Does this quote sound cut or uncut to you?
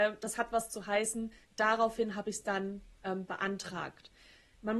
cut